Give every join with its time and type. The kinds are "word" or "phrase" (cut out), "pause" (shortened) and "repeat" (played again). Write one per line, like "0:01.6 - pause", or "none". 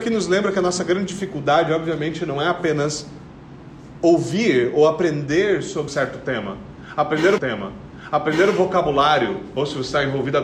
0:05.9 - word
0:07.4 - repeat